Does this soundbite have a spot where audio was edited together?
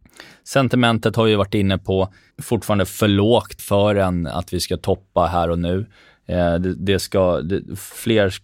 yes; 2 cuts; at 2.3 s, 3.6 s

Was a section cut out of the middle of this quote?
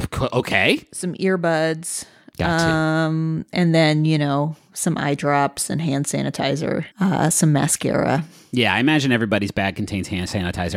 yes; 1 cut; at 6.9 s

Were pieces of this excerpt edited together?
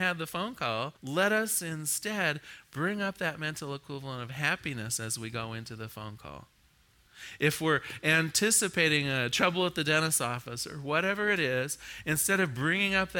yes; 1 cut; at 1.0 s

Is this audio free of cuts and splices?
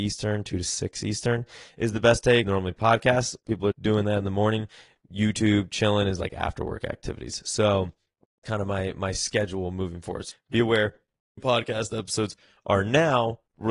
no; 5 cuts; at 2.4 s, 3.7 s, 8.4 s, 10.3 s, 11.4 s

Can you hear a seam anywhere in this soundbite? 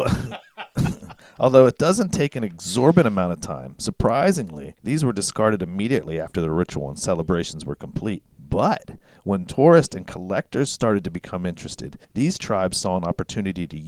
yes; 3 cuts; at 4.8 s, 8.3 s, 12.0 s

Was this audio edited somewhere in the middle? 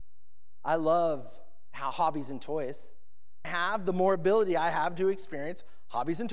yes; 1 cut; at 3.4 s

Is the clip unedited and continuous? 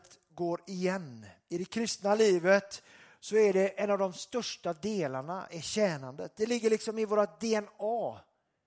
yes; 0 cuts

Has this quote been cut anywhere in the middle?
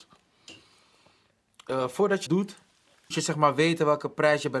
yes; 2 cuts; at 2.3 s, 3.1 s

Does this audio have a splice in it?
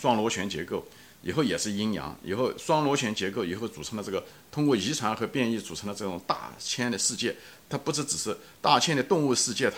no; 0 cuts

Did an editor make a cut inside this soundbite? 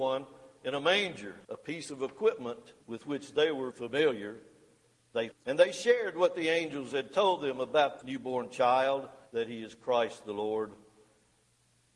yes; 6 cuts; at 1.4 s, 2.8 s, 3.7 s, 5.3 s, 8.0 s, 9.3 s

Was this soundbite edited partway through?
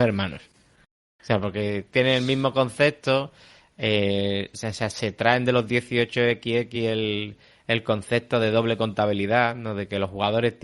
no; 0 cuts

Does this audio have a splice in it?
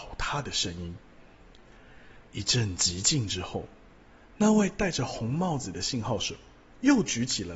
no; 0 cuts

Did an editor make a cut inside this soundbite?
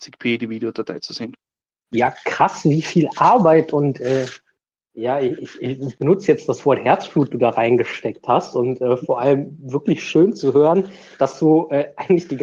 no; 0 cuts

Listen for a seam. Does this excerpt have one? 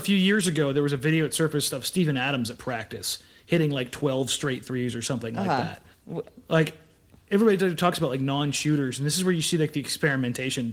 yes; 1 cut; at 5.9 s

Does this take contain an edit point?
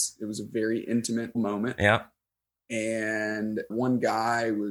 yes; 2 cuts; at 1.3 s, 3.7 s

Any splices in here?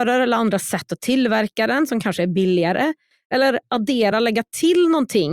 no; 0 cuts

